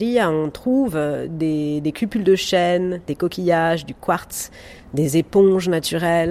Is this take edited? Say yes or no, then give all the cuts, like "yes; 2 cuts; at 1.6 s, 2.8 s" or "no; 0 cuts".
no; 0 cuts